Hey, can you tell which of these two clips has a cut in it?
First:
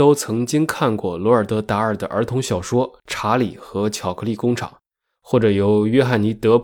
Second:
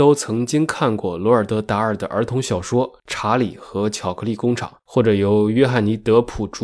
second; 1 cut; at 4.8 s

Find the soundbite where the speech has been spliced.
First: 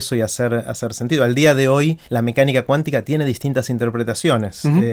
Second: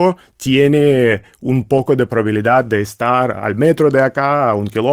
first; 1 cut; at 2.1 s

